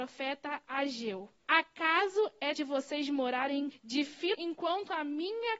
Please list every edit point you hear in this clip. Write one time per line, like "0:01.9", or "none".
0:01.4
0:02.6
0:03.7
0:04.3